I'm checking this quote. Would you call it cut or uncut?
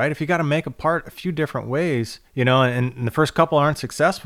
cut